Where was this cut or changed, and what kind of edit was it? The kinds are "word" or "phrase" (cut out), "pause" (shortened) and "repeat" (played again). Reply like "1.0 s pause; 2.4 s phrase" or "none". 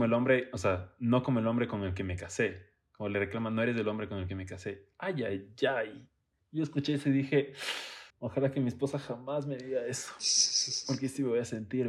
6.4 s pause; 8.1 s pause